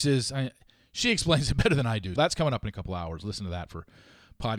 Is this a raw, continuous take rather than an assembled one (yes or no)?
no